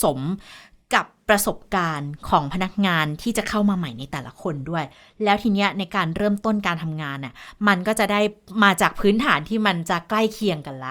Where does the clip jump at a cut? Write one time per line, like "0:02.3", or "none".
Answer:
none